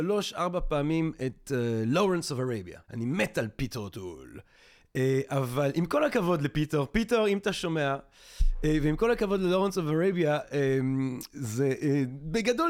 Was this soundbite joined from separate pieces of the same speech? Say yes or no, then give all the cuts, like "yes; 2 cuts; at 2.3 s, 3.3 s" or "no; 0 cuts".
yes; 1 cut; at 2.8 s